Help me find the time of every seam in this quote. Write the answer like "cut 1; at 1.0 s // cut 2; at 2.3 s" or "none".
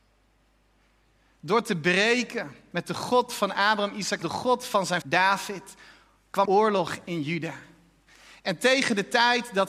cut 1; at 3.3 s // cut 2; at 4.2 s // cut 3; at 5.0 s // cut 4; at 6.4 s